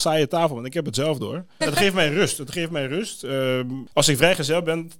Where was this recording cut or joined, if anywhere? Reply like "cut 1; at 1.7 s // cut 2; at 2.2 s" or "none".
cut 1; at 1.6 s // cut 2; at 3.9 s